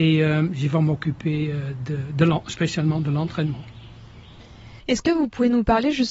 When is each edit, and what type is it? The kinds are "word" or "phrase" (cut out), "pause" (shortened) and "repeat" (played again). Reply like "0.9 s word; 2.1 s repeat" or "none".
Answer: 4.8 s pause